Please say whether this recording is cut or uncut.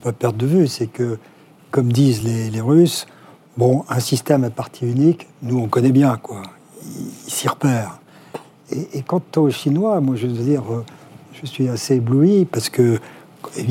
uncut